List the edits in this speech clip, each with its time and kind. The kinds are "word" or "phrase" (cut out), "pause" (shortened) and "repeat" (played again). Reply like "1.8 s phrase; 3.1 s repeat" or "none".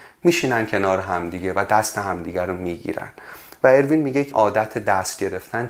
4.3 s word